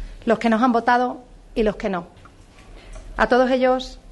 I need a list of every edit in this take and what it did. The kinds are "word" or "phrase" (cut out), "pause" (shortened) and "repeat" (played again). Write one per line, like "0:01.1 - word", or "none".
none